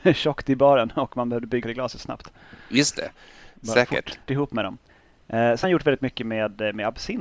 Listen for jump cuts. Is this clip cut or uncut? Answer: cut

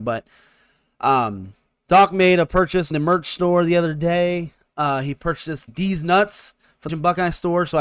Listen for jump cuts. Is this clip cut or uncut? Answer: cut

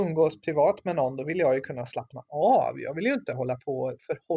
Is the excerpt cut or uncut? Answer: uncut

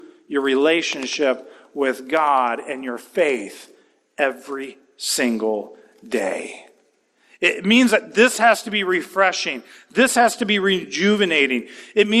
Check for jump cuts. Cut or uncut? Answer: uncut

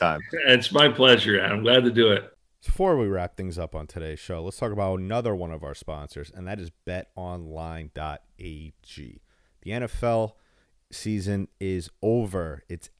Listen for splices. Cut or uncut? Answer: uncut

